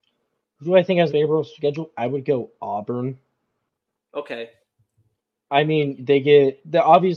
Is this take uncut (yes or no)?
no